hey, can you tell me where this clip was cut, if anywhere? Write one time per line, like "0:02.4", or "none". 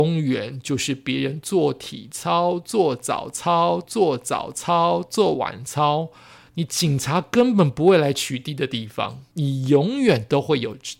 0:03.8
0:09.3